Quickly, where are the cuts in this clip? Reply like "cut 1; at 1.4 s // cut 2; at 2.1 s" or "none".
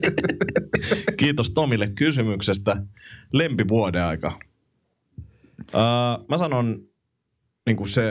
none

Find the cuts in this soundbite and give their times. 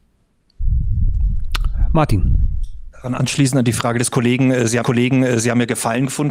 cut 1; at 4.8 s

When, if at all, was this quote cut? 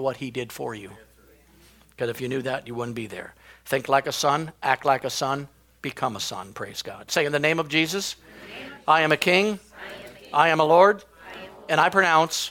none

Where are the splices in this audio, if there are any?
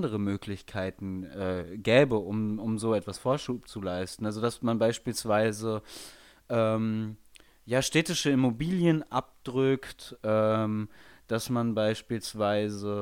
none

